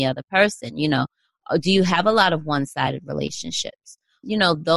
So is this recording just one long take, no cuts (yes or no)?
yes